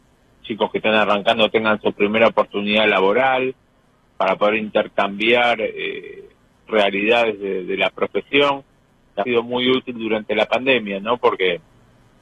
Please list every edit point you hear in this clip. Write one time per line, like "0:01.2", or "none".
0:09.2